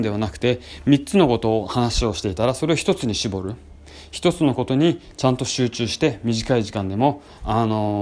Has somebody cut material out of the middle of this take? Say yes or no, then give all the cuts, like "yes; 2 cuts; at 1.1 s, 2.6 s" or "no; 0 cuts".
no; 0 cuts